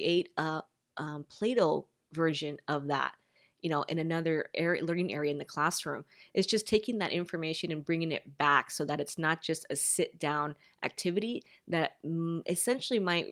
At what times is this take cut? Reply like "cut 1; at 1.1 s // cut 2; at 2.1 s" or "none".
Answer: none